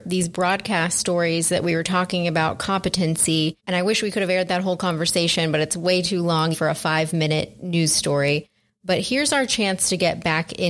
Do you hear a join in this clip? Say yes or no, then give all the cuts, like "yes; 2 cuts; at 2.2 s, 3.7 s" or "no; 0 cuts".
yes; 2 cuts; at 3.6 s, 6.5 s